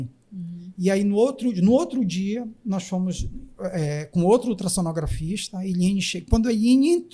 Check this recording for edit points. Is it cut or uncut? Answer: uncut